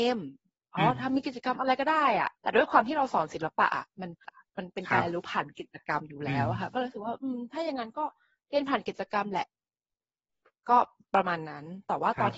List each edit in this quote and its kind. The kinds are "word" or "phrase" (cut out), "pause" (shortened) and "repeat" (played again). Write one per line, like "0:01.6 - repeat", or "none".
0:02.4 - pause
0:04.2 - phrase